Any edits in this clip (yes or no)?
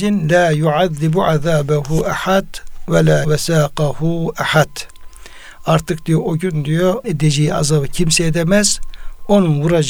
yes